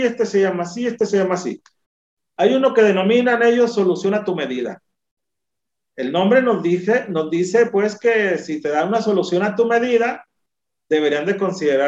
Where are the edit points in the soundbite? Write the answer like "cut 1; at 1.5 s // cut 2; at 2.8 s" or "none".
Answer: none